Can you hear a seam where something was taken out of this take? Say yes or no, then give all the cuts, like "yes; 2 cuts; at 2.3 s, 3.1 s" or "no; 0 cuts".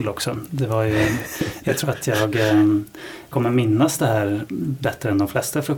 yes; 2 cuts; at 1.6 s, 3.3 s